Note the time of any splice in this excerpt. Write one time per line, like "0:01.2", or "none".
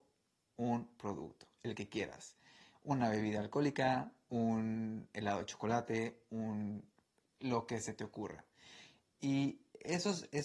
none